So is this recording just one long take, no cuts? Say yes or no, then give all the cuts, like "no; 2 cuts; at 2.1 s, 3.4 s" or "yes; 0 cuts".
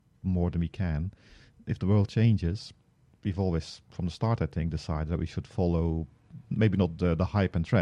yes; 0 cuts